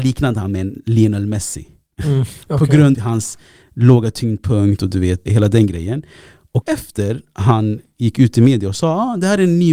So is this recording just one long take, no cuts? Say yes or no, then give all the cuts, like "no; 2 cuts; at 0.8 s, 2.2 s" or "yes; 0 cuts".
no; 3 cuts; at 2.9 s, 5.3 s, 6.6 s